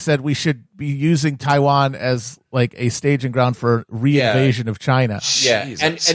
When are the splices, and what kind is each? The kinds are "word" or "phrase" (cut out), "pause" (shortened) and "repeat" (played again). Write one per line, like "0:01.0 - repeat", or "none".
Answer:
none